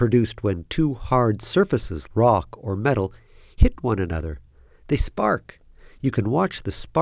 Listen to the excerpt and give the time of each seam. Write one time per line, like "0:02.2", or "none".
0:02.1

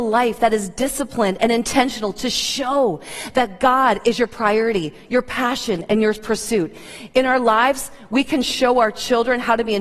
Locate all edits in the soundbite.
none

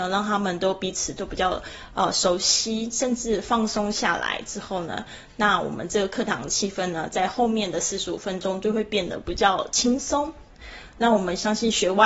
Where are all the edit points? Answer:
none

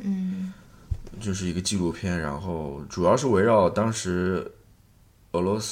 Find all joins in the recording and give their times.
none

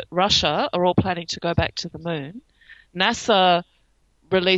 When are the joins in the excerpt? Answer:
none

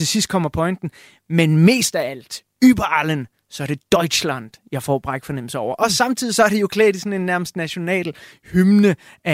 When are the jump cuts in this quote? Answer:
none

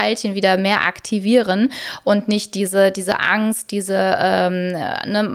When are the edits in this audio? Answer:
none

